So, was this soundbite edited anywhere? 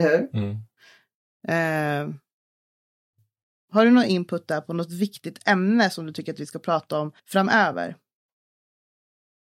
yes; 1 cut; at 7.2 s

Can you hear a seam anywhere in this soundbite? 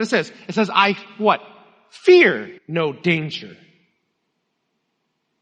yes; 1 cut; at 2.6 s

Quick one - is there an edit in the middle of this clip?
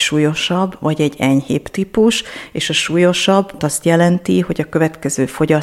yes; 1 cut; at 3.6 s

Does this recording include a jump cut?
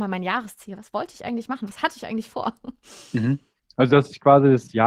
no; 0 cuts

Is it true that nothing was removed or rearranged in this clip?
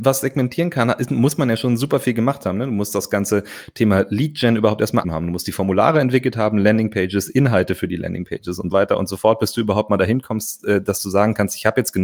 no; 2 cuts; at 5.0 s, 8.7 s

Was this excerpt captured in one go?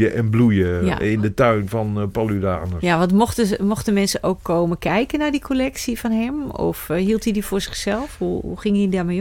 yes; 0 cuts

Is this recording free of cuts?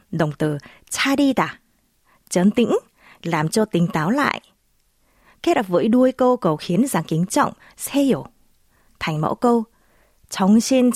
yes; 0 cuts

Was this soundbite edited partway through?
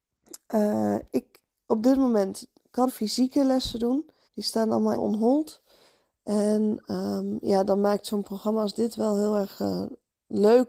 yes; 3 cuts; at 2.9 s, 4.3 s, 4.9 s

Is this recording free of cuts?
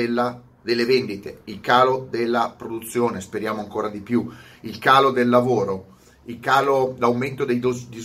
yes; 0 cuts

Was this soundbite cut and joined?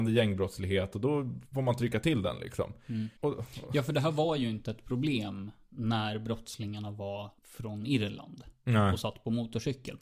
yes; 3 cuts; at 1.4 s, 3.2 s, 7.4 s

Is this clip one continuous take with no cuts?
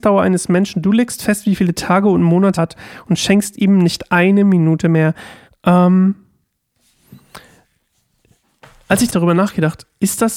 no; 3 cuts; at 2.6 s, 5.5 s, 9.1 s

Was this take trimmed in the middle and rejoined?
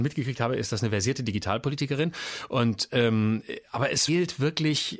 yes; 1 cut; at 4.1 s

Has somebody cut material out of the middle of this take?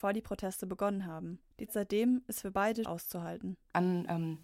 yes; 2 cuts; at 1.7 s, 2.8 s

